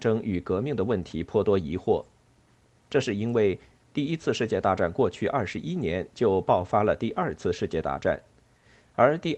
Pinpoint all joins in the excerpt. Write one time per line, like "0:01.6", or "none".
none